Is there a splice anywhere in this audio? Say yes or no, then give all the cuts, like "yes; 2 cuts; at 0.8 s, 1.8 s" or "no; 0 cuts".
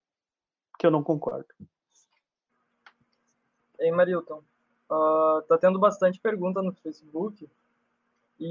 no; 0 cuts